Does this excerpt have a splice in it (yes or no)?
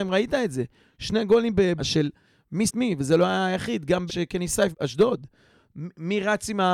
yes